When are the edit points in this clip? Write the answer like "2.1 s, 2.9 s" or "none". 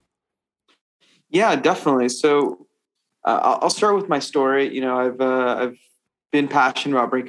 none